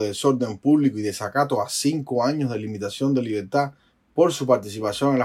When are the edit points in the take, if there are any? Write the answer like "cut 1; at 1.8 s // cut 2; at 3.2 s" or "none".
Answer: none